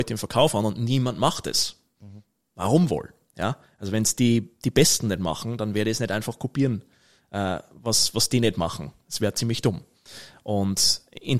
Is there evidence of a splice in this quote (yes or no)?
no